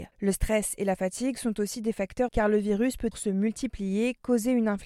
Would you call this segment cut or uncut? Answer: cut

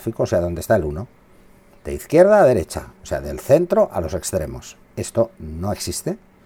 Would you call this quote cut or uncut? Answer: cut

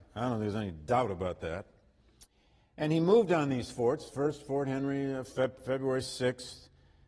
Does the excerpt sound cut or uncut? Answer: uncut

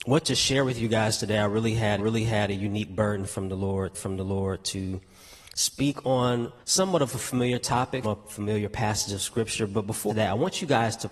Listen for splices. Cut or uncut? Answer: cut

